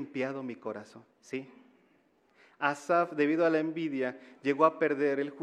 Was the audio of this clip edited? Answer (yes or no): yes